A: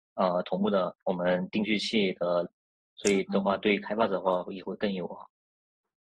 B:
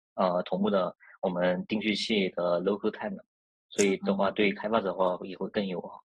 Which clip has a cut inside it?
A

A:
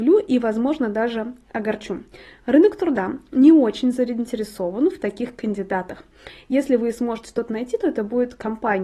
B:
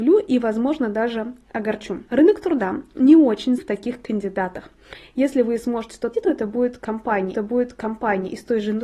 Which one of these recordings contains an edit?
B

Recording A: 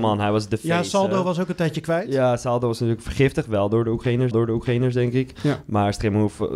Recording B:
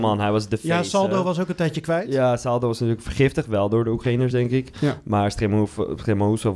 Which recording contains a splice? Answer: A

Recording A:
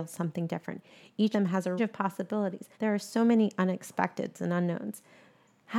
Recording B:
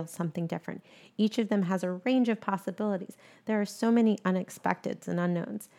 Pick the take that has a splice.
A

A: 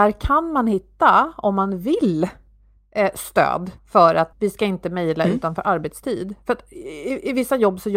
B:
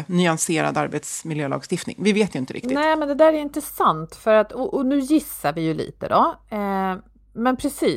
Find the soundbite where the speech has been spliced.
A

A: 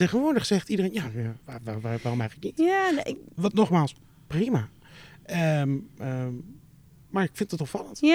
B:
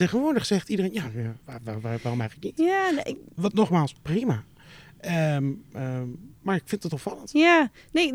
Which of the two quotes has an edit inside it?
B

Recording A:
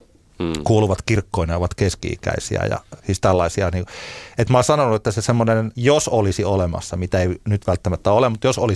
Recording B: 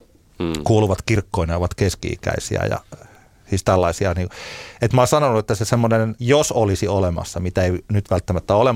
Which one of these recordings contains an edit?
A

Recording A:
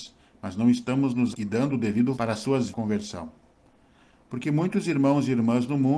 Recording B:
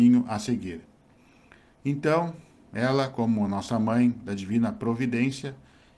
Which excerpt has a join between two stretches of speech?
A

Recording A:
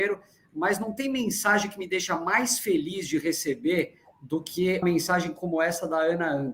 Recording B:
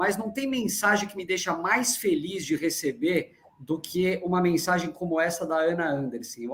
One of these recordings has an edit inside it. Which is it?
A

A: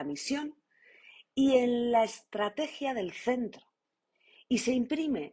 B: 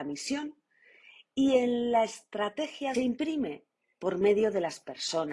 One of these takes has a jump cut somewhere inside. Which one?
B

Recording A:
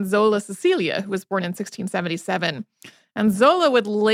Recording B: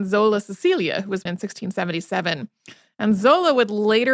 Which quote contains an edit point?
B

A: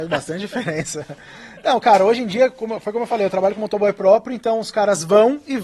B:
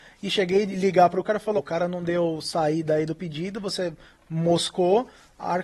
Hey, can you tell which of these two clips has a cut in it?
B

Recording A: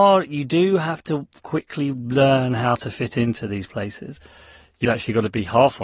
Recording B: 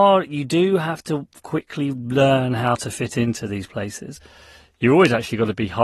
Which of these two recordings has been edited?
A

